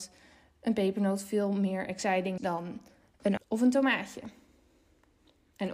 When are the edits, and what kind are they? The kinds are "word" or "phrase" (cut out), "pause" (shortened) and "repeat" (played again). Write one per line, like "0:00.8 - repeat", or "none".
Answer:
0:02.4 - word
0:03.4 - word